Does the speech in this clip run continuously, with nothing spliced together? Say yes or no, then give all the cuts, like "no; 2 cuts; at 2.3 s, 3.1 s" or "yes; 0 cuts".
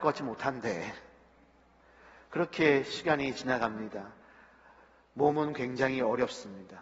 yes; 0 cuts